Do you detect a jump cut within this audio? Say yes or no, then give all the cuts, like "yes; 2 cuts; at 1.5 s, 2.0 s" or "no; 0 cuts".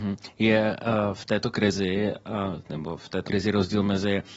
yes; 1 cut; at 3.3 s